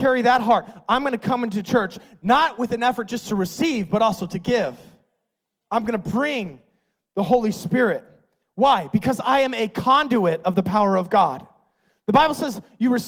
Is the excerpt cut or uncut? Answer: uncut